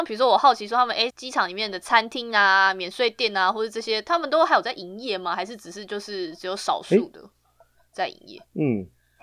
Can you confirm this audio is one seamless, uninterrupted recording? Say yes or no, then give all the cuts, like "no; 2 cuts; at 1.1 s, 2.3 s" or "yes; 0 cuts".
no; 1 cut; at 1.1 s